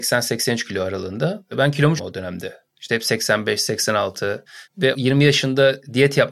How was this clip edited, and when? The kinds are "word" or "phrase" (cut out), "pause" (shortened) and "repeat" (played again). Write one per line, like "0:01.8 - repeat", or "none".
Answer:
0:02.0 - phrase